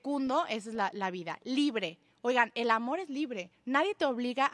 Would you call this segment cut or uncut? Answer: uncut